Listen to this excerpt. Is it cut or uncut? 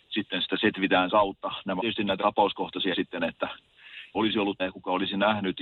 cut